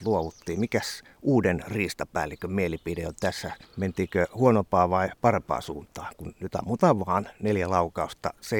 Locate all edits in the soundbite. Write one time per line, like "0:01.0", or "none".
0:03.6